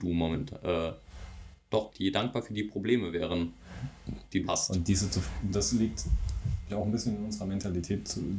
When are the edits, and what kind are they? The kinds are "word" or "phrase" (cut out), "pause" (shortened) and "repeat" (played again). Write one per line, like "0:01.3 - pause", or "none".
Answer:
0:01.9 - word
0:04.4 - word
0:06.7 - word